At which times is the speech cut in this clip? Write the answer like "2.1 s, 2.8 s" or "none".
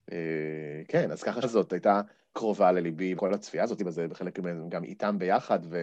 1.4 s, 2.3 s, 3.2 s, 3.8 s